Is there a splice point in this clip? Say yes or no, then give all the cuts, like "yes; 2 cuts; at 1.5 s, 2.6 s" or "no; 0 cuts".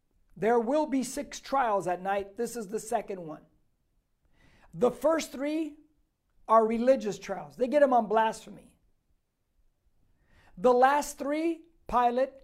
no; 0 cuts